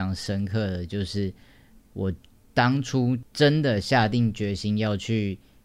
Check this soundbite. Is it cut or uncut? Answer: uncut